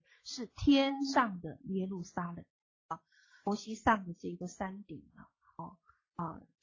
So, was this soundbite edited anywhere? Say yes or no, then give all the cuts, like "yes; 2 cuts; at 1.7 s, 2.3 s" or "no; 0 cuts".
no; 0 cuts